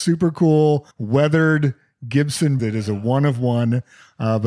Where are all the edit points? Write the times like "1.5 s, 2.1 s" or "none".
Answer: 0.9 s, 2.6 s

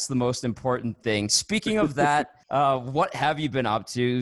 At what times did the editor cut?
2.4 s

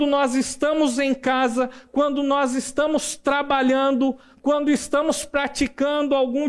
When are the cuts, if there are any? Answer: none

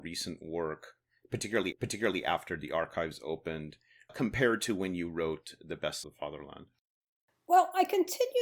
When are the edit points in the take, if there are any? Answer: 1.7 s, 4.1 s, 6.0 s

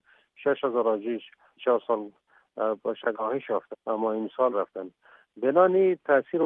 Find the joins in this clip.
1.6 s, 3.1 s, 3.7 s, 4.5 s

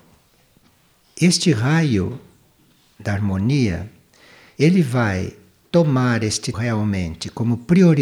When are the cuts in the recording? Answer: 6.5 s

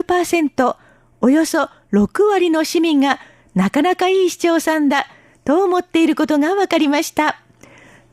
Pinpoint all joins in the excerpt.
none

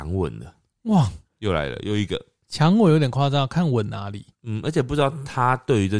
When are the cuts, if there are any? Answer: 1.3 s, 4.3 s

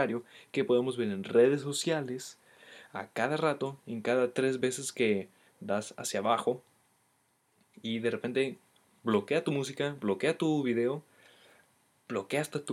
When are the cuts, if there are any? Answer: none

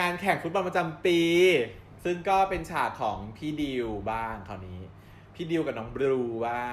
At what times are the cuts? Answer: 2.0 s

